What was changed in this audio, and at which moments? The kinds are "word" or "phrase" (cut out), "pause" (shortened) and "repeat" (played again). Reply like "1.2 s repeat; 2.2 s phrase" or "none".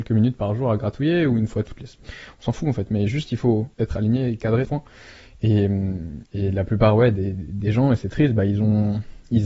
3.7 s pause; 4.6 s phrase; 7.3 s word